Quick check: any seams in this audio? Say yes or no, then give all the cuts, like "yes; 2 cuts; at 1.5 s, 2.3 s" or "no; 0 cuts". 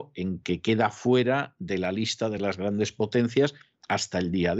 no; 0 cuts